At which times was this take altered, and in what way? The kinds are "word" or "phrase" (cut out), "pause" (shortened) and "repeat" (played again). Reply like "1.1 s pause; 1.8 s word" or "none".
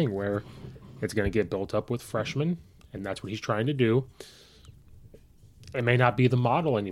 none